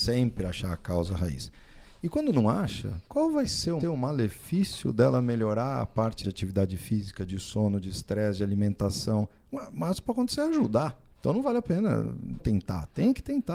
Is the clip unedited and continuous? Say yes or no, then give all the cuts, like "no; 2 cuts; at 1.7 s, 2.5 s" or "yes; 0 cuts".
no; 5 cuts; at 3.0 s, 3.8 s, 6.2 s, 11.1 s, 12.4 s